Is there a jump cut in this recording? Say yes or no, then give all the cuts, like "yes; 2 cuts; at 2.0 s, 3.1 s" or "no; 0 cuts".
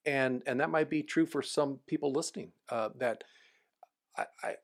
no; 0 cuts